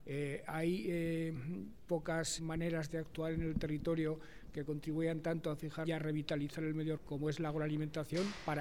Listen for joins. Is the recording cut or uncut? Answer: cut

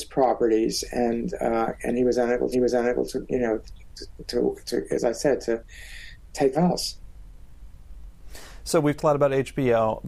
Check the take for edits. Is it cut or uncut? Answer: cut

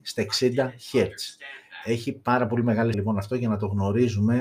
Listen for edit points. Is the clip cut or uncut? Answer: cut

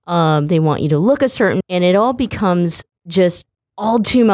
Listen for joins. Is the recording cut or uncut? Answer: cut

